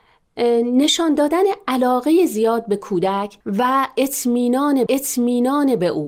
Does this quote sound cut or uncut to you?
cut